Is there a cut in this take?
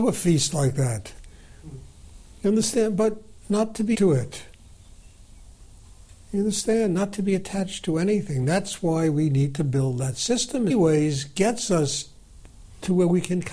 yes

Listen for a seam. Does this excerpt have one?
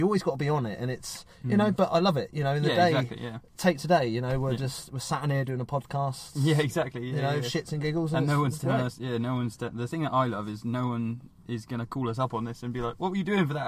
yes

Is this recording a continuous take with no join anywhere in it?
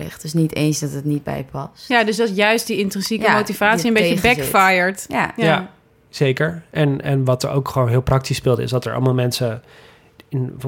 yes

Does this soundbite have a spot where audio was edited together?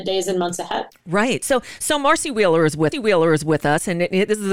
yes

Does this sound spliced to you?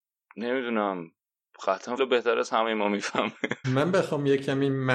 yes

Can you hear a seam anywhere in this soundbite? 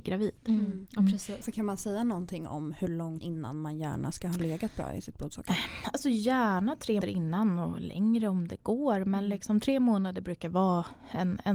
yes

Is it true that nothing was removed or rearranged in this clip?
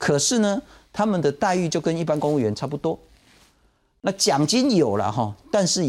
yes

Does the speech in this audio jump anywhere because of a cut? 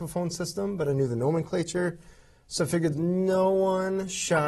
yes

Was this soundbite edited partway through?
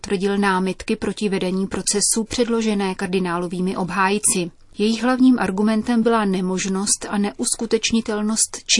no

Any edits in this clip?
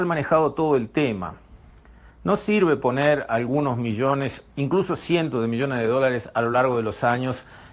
no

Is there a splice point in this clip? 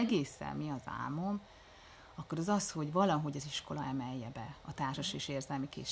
no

